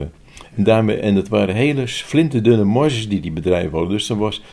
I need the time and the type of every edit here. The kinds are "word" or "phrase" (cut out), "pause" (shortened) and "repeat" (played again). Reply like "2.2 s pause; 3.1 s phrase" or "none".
none

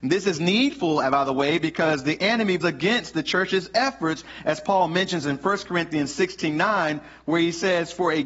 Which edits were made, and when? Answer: 2.6 s word

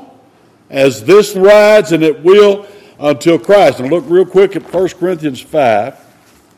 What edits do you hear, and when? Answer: 1.3 s word

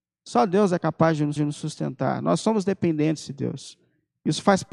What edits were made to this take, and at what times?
1.4 s repeat

